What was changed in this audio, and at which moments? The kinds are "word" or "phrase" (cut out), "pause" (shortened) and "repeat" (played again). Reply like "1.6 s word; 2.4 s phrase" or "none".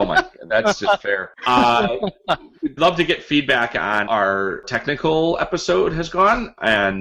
1.0 s word; 2.8 s word; 4.1 s word; 4.6 s phrase